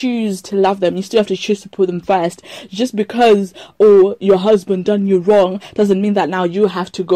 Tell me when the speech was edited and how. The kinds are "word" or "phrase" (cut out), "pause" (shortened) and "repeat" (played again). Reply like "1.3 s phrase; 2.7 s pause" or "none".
none